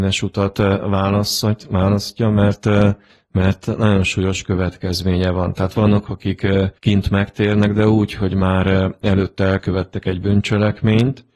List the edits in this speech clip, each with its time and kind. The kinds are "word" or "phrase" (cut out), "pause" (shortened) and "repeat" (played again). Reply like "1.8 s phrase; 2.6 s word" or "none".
3.1 s pause; 6.0 s word; 6.8 s pause